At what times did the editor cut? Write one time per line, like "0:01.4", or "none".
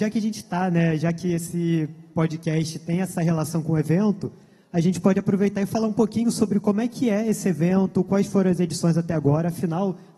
none

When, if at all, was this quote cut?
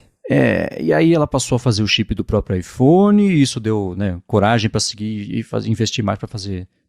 none

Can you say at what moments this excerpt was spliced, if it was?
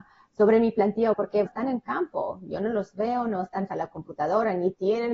0:01.1
0:01.5
0:03.7

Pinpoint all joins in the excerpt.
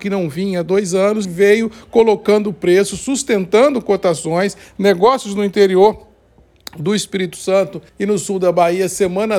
0:01.2
0:07.9

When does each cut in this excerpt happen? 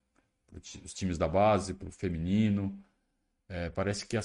none

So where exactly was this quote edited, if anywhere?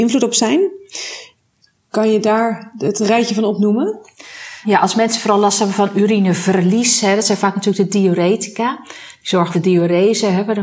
0:09.5

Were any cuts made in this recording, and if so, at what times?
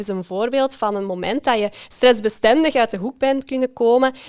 none

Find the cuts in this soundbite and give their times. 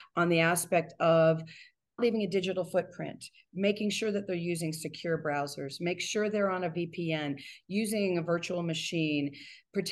0:02.0

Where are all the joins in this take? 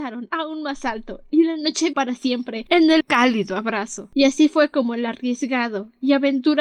0:01.9
0:03.0

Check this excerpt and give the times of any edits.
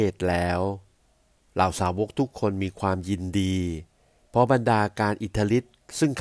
none

